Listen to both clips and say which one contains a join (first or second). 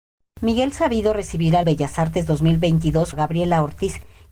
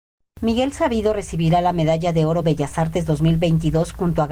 first